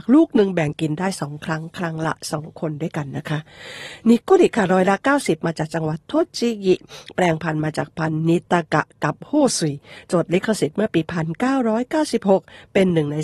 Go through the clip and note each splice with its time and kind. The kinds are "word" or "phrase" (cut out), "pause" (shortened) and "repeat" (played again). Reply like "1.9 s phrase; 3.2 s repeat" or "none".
8.4 s pause